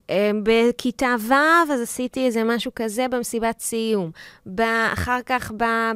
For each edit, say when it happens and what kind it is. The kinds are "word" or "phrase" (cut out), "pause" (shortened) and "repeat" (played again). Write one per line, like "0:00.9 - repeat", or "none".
none